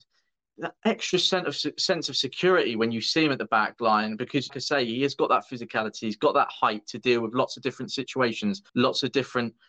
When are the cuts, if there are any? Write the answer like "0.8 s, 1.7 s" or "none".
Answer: 4.5 s, 8.7 s